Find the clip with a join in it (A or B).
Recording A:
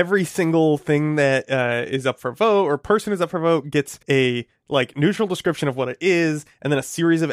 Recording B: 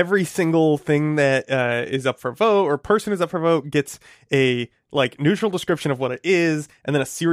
A